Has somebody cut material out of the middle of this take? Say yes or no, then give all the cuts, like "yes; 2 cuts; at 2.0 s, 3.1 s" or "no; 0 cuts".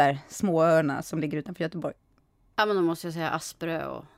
no; 0 cuts